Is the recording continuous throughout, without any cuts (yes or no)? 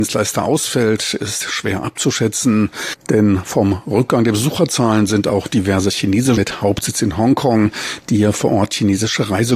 no